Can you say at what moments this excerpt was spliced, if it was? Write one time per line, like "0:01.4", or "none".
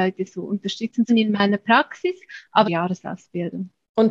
0:01.1
0:02.6